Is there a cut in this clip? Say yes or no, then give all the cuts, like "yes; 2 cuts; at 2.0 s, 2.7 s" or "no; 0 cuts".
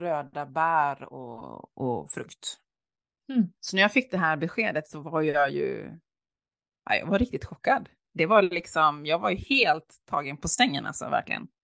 yes; 1 cut; at 3.6 s